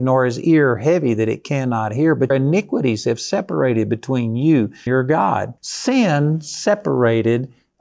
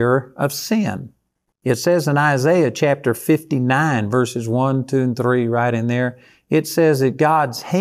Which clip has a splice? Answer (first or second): first